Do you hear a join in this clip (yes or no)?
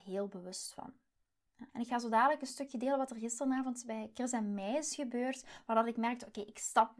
yes